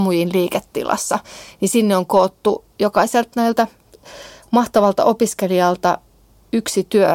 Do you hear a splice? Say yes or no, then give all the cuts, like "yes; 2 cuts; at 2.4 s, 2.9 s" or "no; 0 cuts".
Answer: no; 0 cuts